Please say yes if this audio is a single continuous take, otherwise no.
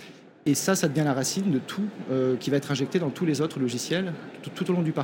yes